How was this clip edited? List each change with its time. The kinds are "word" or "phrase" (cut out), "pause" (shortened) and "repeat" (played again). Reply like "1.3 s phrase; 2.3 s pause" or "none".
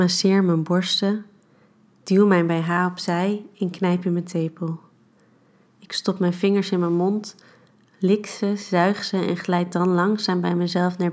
none